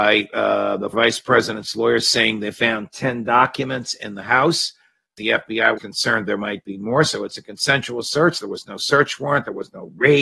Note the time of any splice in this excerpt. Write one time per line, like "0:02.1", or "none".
0:00.9
0:05.2
0:05.8